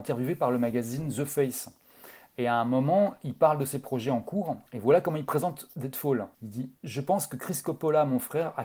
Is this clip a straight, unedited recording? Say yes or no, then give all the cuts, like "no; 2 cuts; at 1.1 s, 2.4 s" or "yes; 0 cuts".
no; 3 cuts; at 4.7 s, 6.3 s, 6.8 s